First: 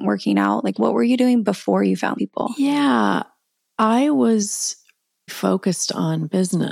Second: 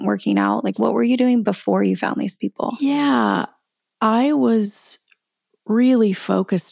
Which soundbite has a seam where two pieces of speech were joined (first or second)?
first